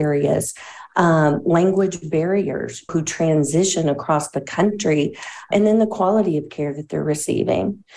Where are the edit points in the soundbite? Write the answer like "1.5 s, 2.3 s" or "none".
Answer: 2.9 s, 5.5 s